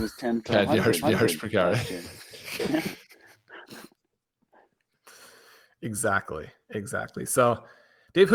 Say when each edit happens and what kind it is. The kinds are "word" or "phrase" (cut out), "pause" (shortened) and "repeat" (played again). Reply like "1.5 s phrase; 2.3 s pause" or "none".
1.0 s repeat

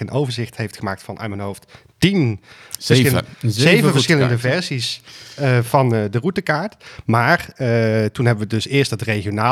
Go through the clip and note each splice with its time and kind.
none

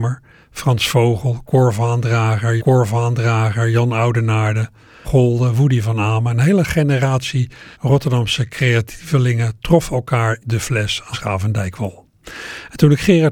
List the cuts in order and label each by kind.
2.6 s repeat; 5.0 s phrase; 7.7 s pause; 10.4 s word; 11.1 s word

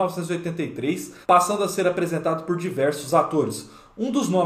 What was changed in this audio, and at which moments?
1.2 s pause

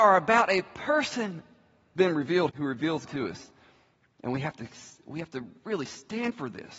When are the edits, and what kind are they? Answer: 2.0 s word; 2.5 s word; 3.0 s word

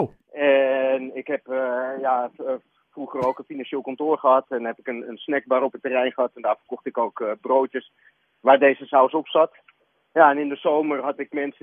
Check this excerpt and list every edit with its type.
none

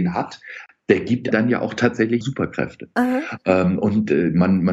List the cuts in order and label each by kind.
1.3 s word; 2.2 s word

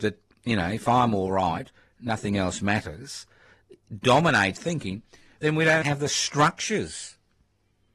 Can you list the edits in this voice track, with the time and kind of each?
4.6 s word; 5.8 s word

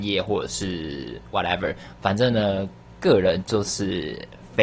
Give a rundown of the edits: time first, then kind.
none

